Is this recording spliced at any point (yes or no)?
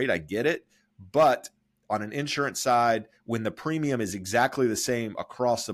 no